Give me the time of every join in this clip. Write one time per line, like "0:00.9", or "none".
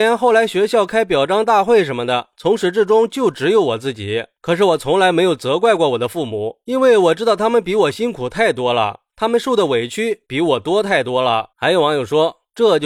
0:11.5